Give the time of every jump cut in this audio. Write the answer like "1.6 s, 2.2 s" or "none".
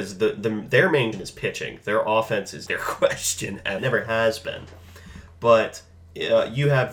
1.1 s, 2.7 s, 3.8 s